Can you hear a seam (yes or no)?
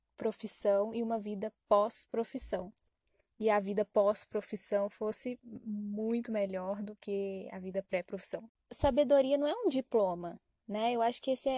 no